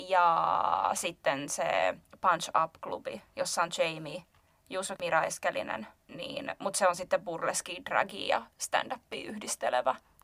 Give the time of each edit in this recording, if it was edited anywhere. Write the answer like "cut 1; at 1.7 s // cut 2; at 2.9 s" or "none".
cut 1; at 5.0 s